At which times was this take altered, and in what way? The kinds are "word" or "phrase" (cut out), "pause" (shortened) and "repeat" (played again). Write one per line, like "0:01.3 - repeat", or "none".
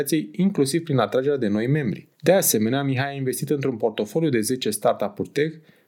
0:02.1 - pause

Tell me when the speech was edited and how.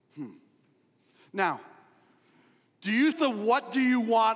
0:03.1 - word

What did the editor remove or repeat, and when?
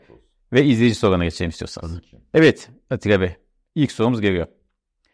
none

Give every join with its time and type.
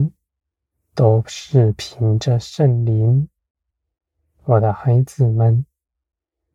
none

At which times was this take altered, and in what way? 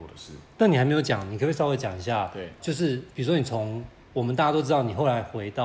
0:02.6 - word

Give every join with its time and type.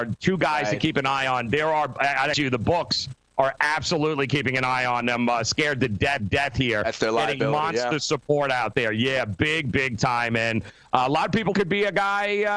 0:02.3 - phrase
0:06.2 - repeat
0:09.7 - word
0:11.5 - phrase

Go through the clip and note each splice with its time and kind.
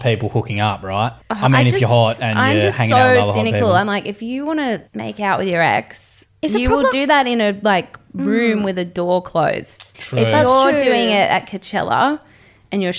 0:01.2 - pause
0:04.9 - pause
0:09.9 - pause

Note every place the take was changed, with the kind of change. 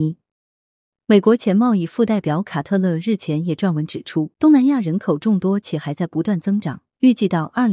0:04.3 - pause

